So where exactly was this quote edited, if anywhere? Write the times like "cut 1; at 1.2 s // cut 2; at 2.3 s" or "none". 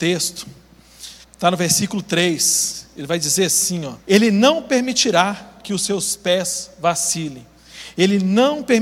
cut 1; at 1.2 s // cut 2; at 4.0 s